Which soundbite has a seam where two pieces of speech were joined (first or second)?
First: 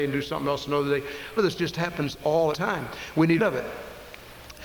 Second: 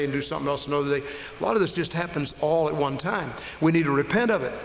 first